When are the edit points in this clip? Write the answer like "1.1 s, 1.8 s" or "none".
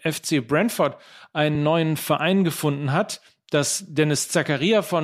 none

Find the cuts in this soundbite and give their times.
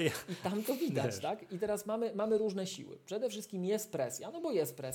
none

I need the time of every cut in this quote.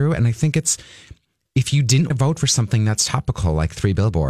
2.1 s

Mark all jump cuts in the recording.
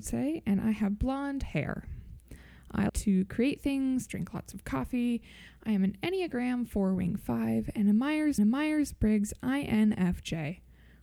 2.9 s, 4.1 s, 8.4 s

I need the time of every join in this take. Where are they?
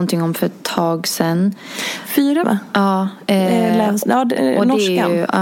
2.4 s

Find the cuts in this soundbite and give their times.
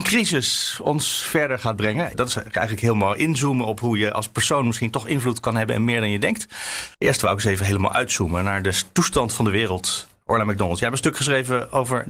6.9 s

